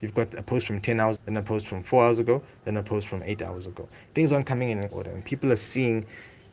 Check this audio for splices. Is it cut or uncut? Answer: cut